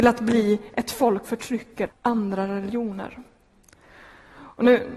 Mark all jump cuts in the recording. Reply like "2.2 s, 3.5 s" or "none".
1.2 s, 1.9 s